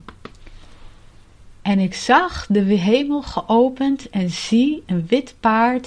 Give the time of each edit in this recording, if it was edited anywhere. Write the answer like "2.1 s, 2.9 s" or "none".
none

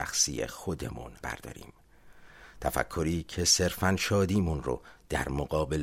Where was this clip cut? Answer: 1.2 s

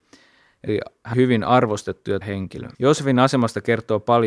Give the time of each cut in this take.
1.1 s, 2.2 s, 2.7 s

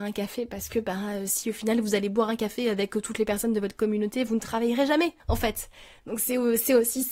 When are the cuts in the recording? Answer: 5.2 s

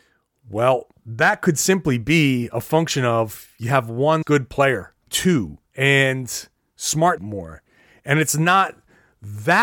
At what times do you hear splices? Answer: 4.2 s, 5.1 s, 5.7 s, 7.2 s

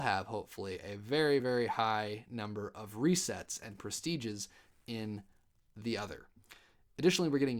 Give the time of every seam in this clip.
none

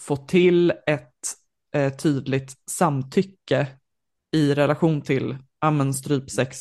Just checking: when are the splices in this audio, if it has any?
none

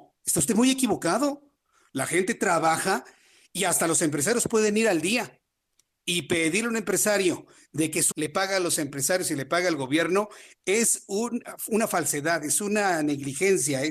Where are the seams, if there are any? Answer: 8.1 s

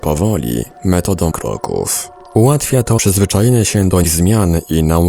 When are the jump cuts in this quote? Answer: 1.3 s, 3.0 s, 4.0 s

